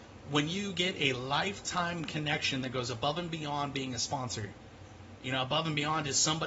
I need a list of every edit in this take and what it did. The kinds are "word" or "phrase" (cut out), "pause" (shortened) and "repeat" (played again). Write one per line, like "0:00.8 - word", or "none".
none